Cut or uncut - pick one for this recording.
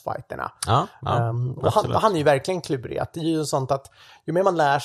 uncut